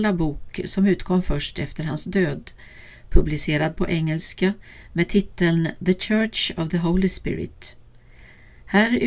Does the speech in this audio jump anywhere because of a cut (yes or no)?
no